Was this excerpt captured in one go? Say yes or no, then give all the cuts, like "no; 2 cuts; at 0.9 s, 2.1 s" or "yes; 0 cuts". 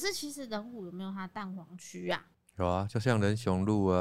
yes; 0 cuts